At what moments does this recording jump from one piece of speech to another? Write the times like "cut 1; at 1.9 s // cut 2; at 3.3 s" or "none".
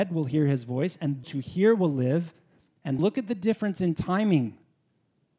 cut 1; at 1.2 s // cut 2; at 3.0 s